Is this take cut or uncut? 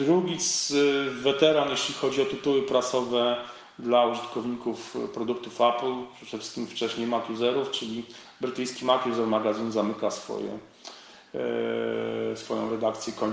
uncut